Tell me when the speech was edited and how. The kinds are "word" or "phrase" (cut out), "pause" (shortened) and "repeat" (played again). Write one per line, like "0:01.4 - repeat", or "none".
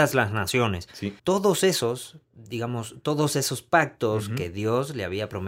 0:01.2 - pause